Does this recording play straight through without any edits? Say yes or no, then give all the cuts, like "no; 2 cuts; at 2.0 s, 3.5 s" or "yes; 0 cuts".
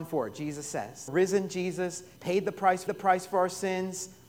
no; 3 cuts; at 1.1 s, 2.2 s, 2.9 s